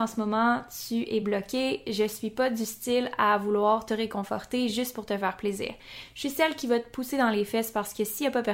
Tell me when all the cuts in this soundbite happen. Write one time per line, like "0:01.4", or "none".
none